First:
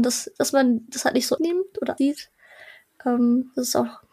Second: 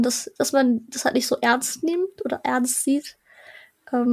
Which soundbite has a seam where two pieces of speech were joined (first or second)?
first